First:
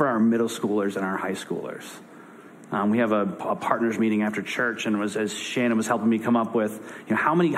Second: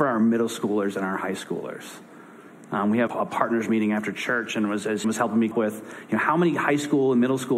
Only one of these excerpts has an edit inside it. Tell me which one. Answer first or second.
second